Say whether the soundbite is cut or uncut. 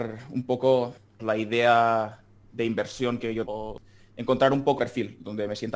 cut